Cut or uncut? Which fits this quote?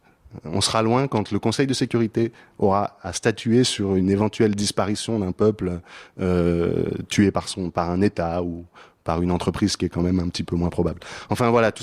uncut